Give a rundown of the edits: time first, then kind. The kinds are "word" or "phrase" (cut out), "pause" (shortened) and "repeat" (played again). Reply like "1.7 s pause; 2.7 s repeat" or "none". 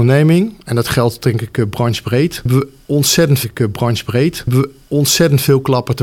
3.4 s repeat